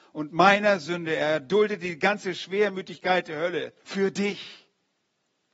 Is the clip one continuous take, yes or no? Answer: no